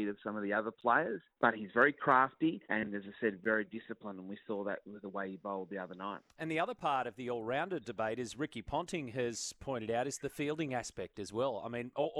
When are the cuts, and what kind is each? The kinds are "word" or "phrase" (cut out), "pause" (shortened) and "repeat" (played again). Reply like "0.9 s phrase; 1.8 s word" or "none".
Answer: 1.3 s pause; 2.6 s pause; 6.3 s pause